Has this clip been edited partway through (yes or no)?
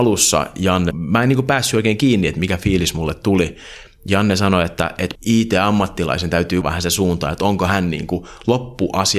yes